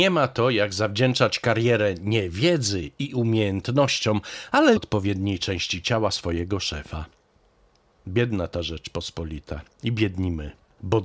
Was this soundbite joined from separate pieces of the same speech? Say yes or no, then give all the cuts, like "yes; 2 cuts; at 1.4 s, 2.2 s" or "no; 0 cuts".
yes; 1 cut; at 4.8 s